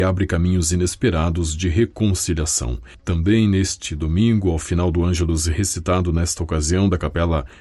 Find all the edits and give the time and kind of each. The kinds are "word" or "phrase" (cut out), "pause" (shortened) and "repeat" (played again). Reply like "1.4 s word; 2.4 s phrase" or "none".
none